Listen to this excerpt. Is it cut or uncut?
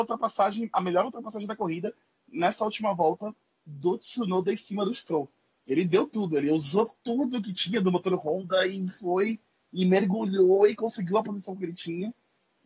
uncut